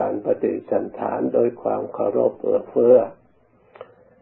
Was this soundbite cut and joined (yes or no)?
no